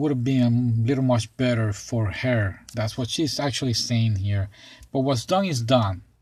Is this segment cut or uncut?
uncut